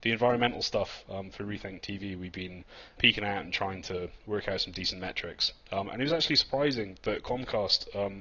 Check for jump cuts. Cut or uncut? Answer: cut